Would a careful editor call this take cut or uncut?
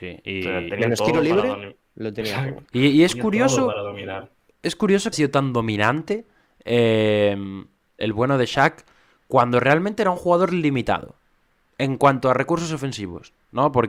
cut